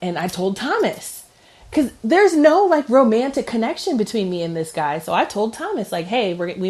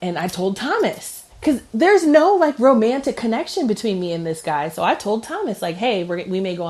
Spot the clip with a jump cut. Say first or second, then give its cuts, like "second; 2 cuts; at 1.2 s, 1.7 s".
second; 1 cut; at 1.3 s